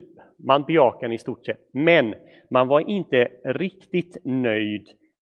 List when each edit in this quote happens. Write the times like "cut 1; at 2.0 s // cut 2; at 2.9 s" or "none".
none